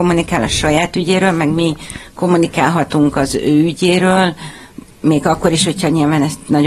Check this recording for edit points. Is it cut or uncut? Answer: uncut